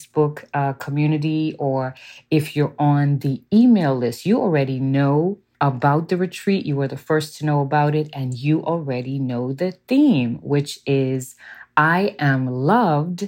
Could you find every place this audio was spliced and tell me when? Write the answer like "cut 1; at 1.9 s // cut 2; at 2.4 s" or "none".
cut 1; at 5.5 s